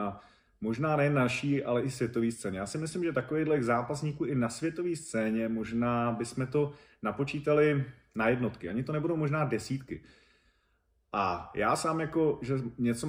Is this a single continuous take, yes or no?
yes